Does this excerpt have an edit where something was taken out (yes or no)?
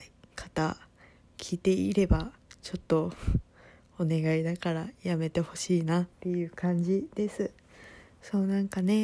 yes